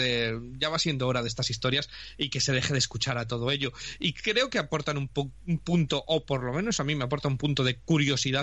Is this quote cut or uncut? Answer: uncut